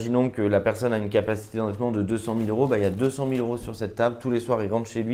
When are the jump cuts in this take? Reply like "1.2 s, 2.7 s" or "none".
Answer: none